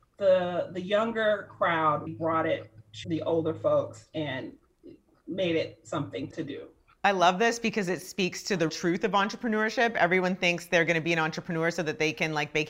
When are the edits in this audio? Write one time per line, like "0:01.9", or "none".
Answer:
0:02.1
0:03.0
0:06.3
0:08.7